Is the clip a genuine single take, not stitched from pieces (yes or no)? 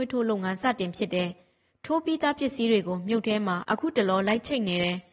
yes